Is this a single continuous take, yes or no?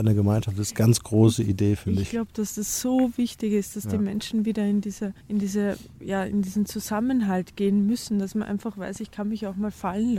no